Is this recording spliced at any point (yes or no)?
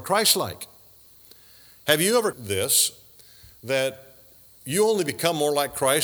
yes